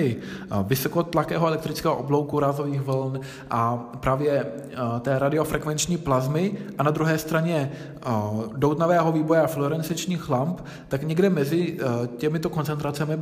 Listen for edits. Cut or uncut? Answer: uncut